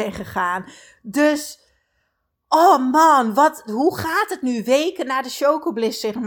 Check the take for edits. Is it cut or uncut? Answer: uncut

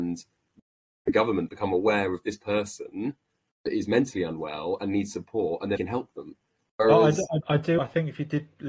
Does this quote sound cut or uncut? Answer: cut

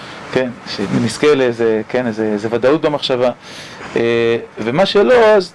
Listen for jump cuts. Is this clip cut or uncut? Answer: uncut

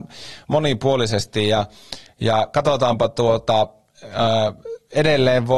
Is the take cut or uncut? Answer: uncut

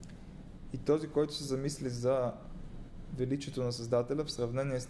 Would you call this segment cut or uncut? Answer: uncut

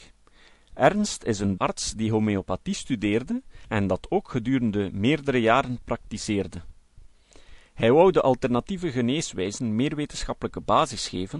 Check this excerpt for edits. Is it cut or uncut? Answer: cut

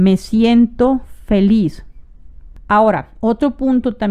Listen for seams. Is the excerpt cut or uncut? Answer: uncut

